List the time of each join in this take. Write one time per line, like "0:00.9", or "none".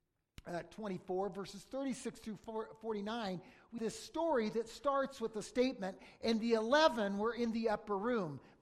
0:03.8